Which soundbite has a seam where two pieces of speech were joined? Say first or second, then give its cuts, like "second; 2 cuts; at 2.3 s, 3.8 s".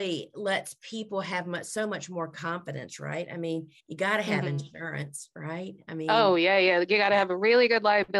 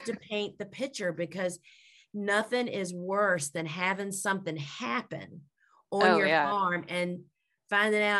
first; 1 cut; at 3.8 s